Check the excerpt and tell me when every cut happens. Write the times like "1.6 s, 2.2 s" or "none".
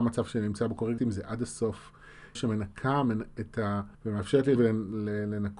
1.0 s, 2.4 s, 3.9 s, 4.6 s